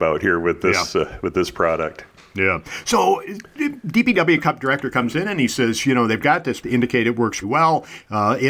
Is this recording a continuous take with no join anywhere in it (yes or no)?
no